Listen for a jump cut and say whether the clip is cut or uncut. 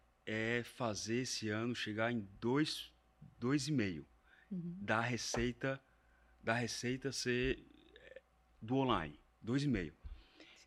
uncut